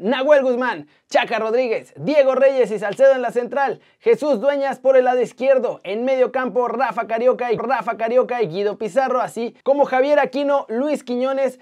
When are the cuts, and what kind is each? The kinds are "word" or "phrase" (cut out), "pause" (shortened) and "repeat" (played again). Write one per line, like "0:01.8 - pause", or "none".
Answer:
0:07.6 - repeat
0:09.6 - pause